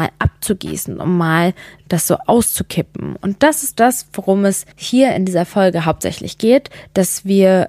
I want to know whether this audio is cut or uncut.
cut